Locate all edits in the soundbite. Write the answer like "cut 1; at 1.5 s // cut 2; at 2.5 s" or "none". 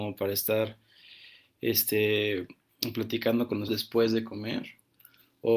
cut 1; at 3.7 s